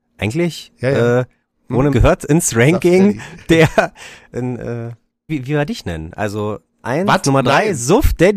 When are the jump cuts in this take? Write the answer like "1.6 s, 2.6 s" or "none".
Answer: 1.9 s, 4.3 s, 5.3 s, 6.8 s